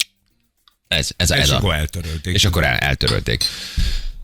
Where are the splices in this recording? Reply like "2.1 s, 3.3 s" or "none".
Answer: none